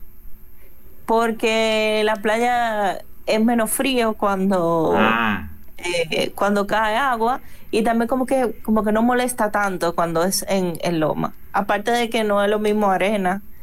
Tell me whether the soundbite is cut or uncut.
uncut